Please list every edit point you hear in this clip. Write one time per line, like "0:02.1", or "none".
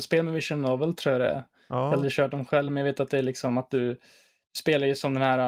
none